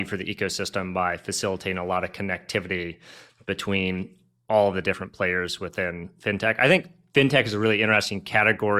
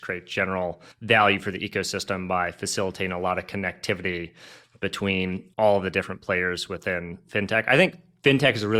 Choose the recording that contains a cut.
second; 2 cuts; at 0.9 s, 5.5 s

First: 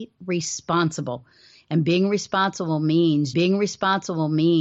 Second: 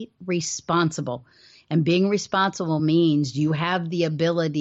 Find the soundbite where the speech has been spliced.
first; 1 cut; at 3.3 s

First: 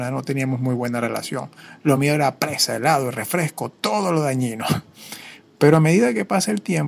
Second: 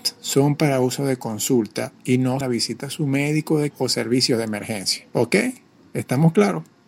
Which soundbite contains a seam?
second; 3 cuts; at 2.4 s, 3.7 s, 5.1 s

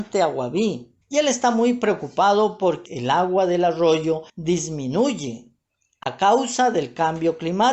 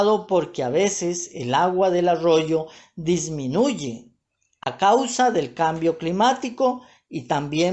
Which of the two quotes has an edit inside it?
first; 3 cuts; at 1.0 s, 2.9 s, 4.3 s

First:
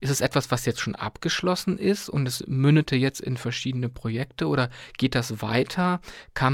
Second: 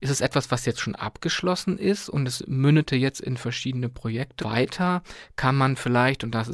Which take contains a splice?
second; 1 cut; at 4.4 s

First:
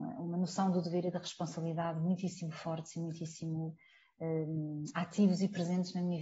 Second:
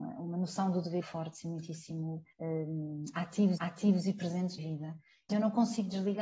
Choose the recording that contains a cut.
second; 5 cuts; at 1.0 s, 2.3 s, 3.6 s, 4.6 s, 5.3 s

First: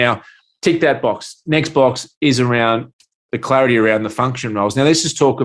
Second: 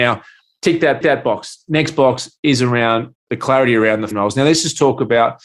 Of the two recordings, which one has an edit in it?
second; 3 cuts; at 1.0 s, 3.2 s, 4.1 s

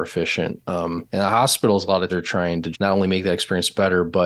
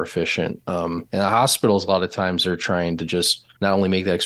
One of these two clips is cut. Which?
first; 2 cuts; at 2.1 s, 2.7 s

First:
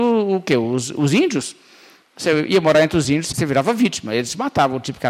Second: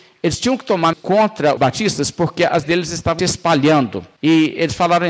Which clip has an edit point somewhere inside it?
second; 4 cuts; at 0.9 s, 1.6 s, 2.6 s, 3.2 s

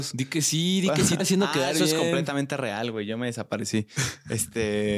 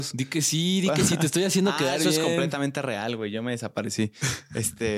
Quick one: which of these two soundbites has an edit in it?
first; 1 cut; at 1.2 s

